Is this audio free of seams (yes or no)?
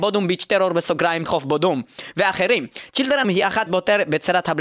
no